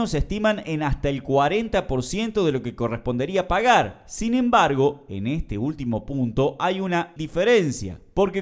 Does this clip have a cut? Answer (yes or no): yes